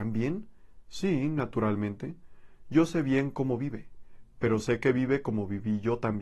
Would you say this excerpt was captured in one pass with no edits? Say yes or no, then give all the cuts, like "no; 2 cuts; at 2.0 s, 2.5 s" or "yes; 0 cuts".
yes; 0 cuts